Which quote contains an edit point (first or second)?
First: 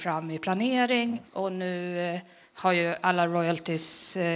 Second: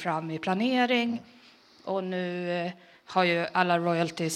first